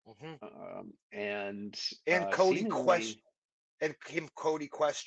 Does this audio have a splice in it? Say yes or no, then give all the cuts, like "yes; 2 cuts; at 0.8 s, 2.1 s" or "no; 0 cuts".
no; 0 cuts